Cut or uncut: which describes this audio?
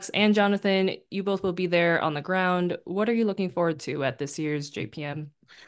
uncut